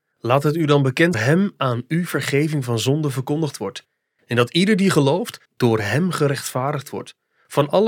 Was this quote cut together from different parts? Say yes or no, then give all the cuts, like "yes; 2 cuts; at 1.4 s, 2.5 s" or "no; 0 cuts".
yes; 2 cuts; at 1.1 s, 5.4 s